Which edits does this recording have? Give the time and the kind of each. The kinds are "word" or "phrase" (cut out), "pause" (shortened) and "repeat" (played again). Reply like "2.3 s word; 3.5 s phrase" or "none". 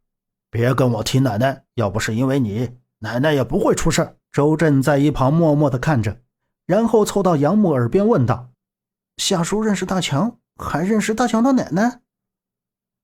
1.7 s pause; 4.2 s pause; 8.5 s pause